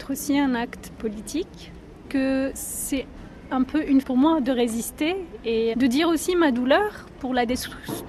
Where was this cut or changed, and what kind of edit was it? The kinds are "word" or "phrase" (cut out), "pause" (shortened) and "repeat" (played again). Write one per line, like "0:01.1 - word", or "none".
0:02.0 - word
0:04.0 - word
0:05.7 - word